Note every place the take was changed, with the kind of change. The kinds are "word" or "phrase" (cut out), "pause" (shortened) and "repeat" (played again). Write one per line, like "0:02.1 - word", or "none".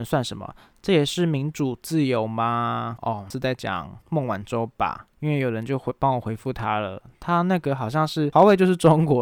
0:04.0 - pause
0:05.1 - pause